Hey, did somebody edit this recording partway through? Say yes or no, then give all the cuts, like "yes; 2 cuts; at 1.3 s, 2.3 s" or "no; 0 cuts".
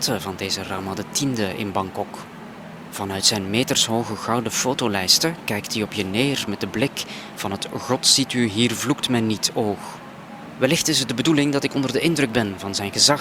no; 0 cuts